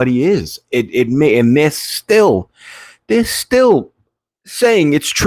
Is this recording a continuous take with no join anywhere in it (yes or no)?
yes